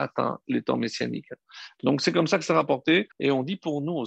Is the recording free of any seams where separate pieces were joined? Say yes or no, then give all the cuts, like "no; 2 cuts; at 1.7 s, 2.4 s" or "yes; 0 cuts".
no; 1 cut; at 3.1 s